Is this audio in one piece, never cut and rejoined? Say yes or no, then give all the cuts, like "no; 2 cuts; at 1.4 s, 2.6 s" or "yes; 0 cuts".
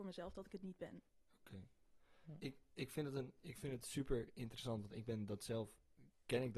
no; 1 cut; at 1.1 s